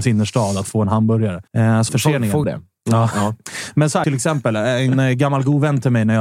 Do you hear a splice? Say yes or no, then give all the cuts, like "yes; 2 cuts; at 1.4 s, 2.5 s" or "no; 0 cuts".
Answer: yes; 4 cuts; at 1.5 s, 1.9 s, 2.4 s, 4.0 s